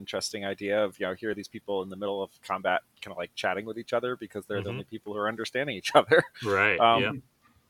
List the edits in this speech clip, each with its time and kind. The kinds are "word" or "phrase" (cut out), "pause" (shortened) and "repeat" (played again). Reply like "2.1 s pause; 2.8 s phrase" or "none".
none